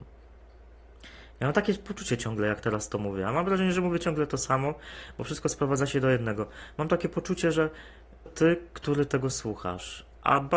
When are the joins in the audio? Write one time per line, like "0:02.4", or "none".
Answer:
0:08.3